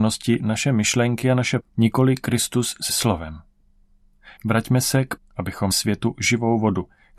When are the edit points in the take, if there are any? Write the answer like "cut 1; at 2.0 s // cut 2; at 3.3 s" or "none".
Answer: cut 1; at 1.6 s // cut 2; at 2.9 s // cut 3; at 4.4 s // cut 4; at 5.2 s // cut 5; at 5.7 s